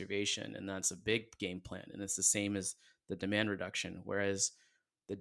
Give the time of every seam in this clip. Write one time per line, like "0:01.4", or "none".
none